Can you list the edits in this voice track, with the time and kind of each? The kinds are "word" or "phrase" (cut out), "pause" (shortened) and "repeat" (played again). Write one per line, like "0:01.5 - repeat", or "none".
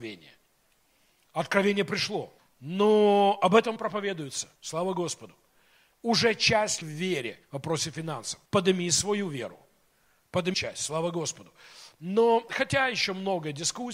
0:02.4 - pause
0:03.8 - word
0:04.6 - pause
0:06.8 - phrase
0:07.4 - pause
0:08.4 - pause
0:10.5 - word
0:12.5 - word